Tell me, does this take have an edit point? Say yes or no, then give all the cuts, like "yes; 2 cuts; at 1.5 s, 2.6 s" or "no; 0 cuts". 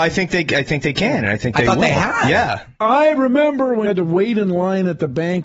yes; 1 cut; at 3.9 s